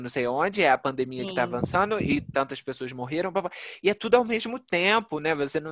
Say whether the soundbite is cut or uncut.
uncut